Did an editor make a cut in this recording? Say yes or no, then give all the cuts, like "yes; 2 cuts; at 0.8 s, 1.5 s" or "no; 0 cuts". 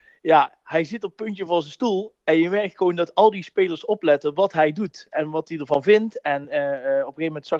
no; 0 cuts